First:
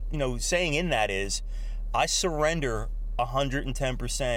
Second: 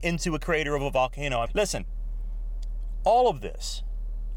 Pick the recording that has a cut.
second; 1 cut; at 1.5 s

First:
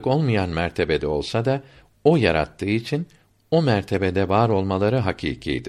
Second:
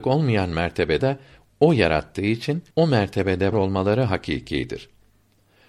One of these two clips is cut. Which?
second; 3 cuts; at 1.0 s, 2.7 s, 3.5 s

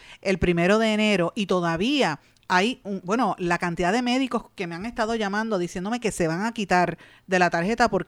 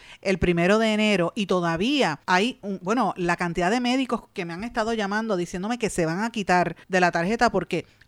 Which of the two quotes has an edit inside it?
second; 2 cuts; at 2.2 s, 6.8 s

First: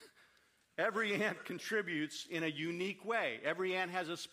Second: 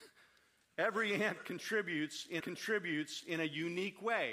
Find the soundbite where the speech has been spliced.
second; 1 cut; at 2.4 s

